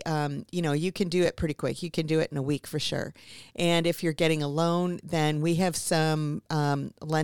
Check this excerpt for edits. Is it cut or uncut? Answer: uncut